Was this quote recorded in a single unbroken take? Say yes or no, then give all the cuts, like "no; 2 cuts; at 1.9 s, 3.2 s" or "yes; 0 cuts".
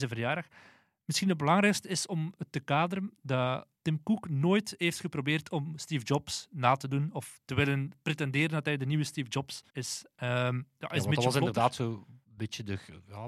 no; 3 cuts; at 3.7 s, 9.7 s, 12.2 s